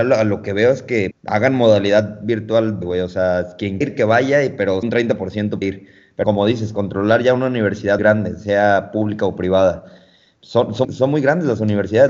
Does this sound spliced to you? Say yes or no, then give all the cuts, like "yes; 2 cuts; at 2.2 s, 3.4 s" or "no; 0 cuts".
yes; 8 cuts; at 1.1 s, 2.8 s, 3.8 s, 4.8 s, 5.6 s, 6.2 s, 8.0 s, 10.8 s